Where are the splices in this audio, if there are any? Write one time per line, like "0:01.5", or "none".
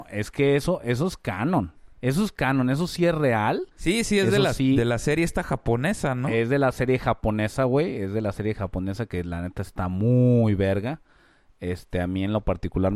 0:01.9
0:03.7